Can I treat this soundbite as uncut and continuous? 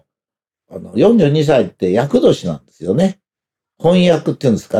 yes; 0 cuts

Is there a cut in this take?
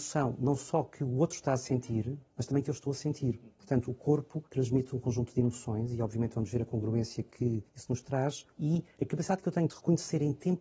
yes; 4 cuts; at 2.3 s, 4.5 s, 7.7 s, 8.5 s

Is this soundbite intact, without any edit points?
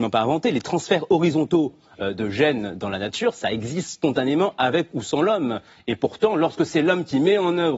yes; 0 cuts

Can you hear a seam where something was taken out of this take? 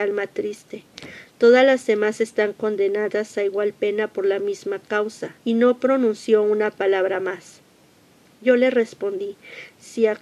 yes; 1 cut; at 5.4 s

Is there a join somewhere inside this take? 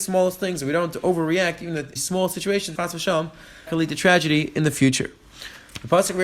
yes; 3 cuts; at 2.0 s, 2.8 s, 3.7 s

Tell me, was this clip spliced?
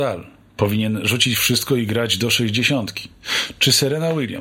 no; 0 cuts

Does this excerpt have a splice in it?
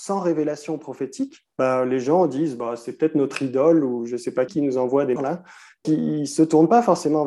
yes; 4 cuts; at 1.5 s, 4.5 s, 5.2 s, 5.8 s

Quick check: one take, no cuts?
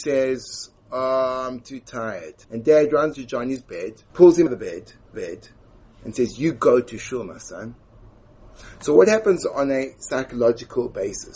no; 5 cuts; at 2.4 s, 3.1 s, 4.1 s, 4.5 s, 5.1 s

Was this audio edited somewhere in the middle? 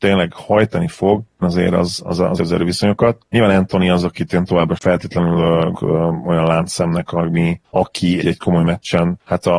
yes; 5 cuts; at 1.4 s, 2.4 s, 4.8 s, 5.7 s, 8.2 s

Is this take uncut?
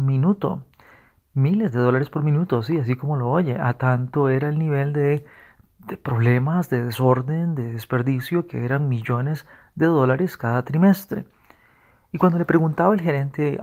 yes; 0 cuts

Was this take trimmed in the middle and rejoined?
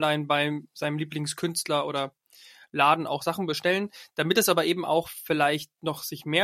no; 0 cuts

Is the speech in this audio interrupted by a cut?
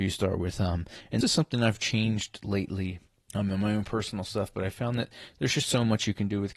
yes; 2 cuts; at 1.2 s, 3.1 s

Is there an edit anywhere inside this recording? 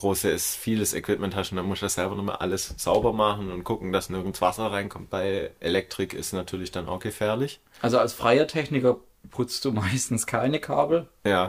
no; 0 cuts

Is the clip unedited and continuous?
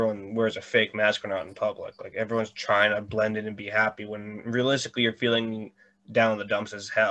yes; 0 cuts

